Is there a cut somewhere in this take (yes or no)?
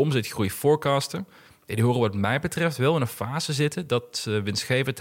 no